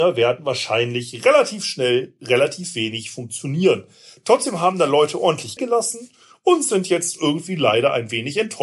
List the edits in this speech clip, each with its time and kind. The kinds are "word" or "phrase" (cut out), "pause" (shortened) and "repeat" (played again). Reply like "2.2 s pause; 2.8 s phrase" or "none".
5.6 s word